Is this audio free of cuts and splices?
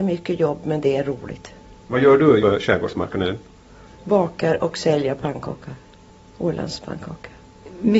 no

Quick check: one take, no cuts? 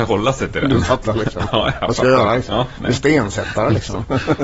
yes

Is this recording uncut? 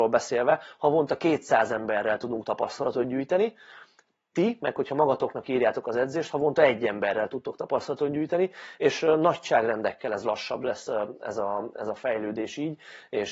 yes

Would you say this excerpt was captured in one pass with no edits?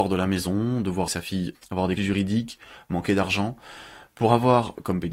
no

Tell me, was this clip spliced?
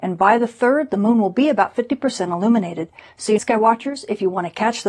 yes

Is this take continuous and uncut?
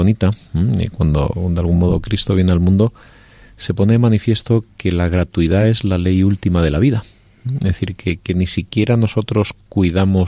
yes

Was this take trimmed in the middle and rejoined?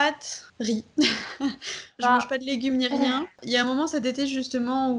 no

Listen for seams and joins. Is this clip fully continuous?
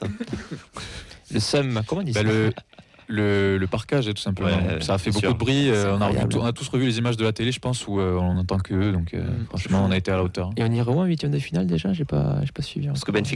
yes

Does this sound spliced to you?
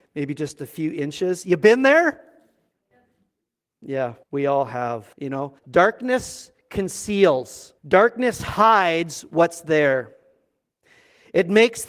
yes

